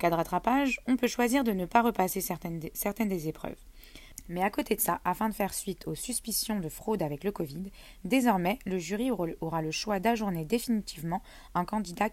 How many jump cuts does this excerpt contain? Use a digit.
0